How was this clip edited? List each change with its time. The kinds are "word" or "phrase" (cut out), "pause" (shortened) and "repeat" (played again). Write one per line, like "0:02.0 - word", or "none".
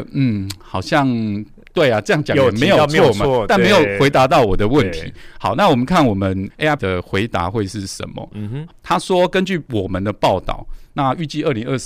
0:06.8 - word